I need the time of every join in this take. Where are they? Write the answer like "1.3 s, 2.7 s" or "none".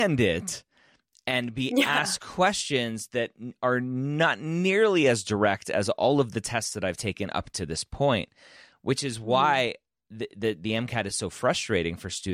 none